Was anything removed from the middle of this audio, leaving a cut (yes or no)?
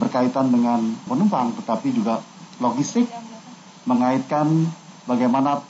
yes